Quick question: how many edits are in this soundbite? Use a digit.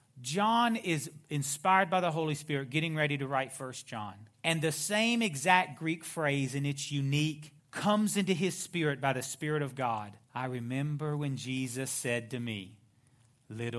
3